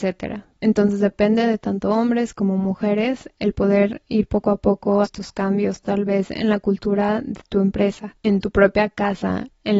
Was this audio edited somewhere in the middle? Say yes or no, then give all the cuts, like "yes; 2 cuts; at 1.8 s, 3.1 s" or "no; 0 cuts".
yes; 1 cut; at 5.0 s